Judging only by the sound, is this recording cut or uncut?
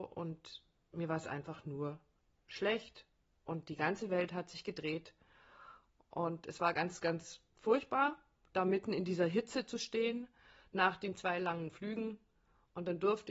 uncut